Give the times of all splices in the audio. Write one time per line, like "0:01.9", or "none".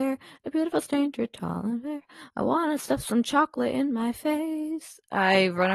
none